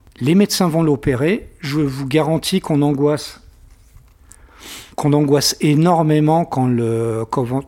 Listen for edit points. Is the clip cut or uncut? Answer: cut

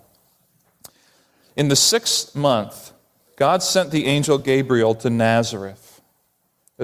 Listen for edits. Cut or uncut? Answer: uncut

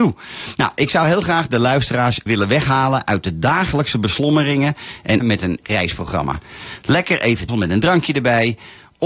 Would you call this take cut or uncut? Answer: cut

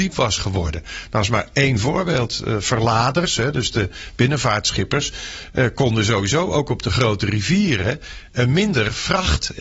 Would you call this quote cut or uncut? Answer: uncut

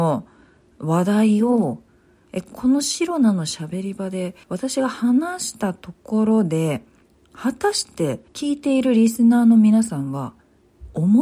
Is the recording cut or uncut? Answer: cut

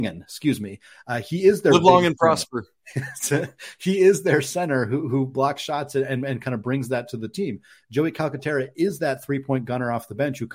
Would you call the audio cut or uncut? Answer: uncut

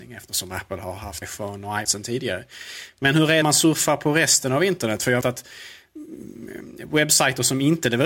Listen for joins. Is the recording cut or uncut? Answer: cut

